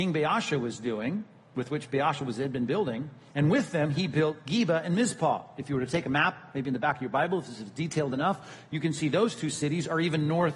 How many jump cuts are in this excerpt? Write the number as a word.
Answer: zero